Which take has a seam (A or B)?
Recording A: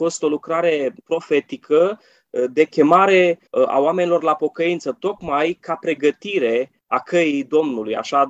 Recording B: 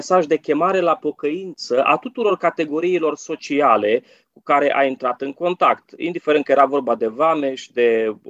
A